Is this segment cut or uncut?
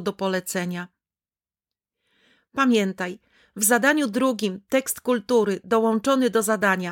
uncut